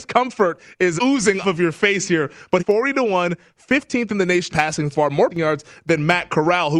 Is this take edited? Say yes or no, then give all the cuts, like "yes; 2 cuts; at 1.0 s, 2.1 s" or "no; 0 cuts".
yes; 6 cuts; at 1.0 s, 1.4 s, 2.6 s, 4.5 s, 4.9 s, 5.3 s